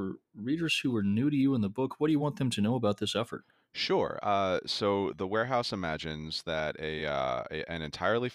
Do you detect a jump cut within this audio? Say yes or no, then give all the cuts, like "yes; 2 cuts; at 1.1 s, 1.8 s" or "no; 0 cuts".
no; 0 cuts